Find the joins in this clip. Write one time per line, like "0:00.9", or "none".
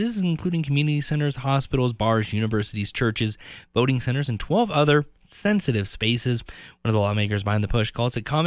none